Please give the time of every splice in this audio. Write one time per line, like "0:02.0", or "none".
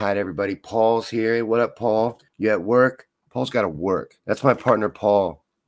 0:02.3
0:03.2
0:04.2

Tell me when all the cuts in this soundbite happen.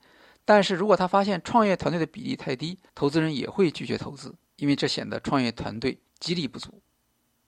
0:02.9
0:04.4
0:06.1

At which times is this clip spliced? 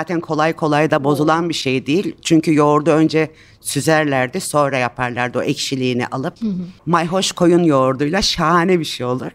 none

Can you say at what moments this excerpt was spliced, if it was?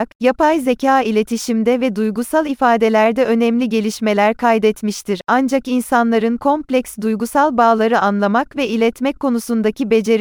none

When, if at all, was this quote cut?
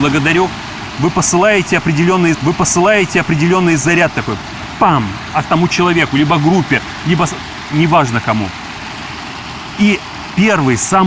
0:02.3
0:05.4

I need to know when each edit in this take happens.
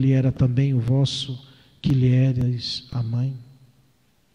none

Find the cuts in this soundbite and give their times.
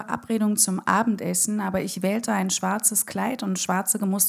none

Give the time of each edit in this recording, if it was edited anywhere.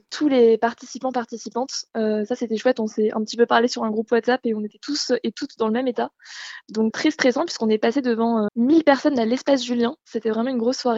0:06.9
0:08.5

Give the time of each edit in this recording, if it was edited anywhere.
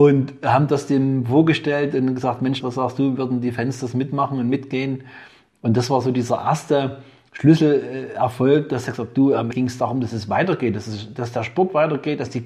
0:02.6
0:09.5

